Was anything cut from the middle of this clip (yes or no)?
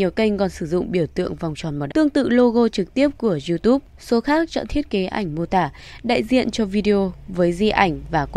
yes